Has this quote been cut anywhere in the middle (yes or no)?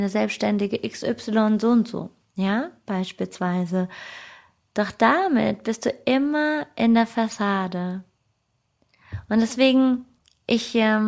no